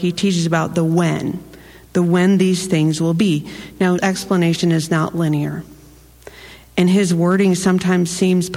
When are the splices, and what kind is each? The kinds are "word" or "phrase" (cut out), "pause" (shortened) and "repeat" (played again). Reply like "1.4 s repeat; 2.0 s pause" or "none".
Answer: 4.0 s word